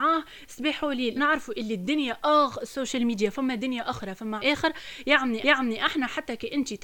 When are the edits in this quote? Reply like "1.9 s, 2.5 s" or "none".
1.2 s, 4.4 s, 5.4 s